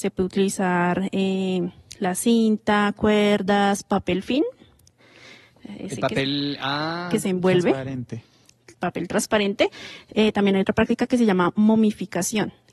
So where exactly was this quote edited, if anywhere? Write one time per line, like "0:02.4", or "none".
none